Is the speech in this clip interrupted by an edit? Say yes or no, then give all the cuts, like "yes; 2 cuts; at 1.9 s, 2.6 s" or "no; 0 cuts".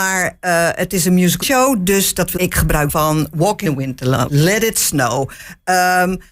yes; 5 cuts; at 1.4 s, 2.4 s, 2.9 s, 3.7 s, 4.3 s